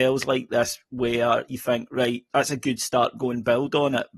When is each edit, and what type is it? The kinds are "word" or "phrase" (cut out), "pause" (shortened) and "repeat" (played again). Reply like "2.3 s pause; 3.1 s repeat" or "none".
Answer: none